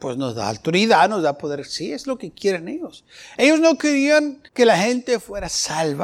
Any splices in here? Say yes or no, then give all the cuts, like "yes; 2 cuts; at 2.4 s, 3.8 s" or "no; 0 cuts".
yes; 1 cut; at 4.5 s